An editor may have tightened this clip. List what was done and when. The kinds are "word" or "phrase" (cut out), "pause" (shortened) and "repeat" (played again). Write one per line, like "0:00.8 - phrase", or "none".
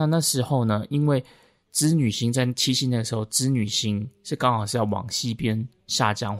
none